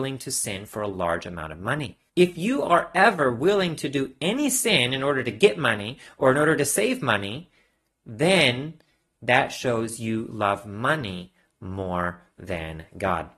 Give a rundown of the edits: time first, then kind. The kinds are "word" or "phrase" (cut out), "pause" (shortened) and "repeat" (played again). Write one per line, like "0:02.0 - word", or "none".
0:02.1 - pause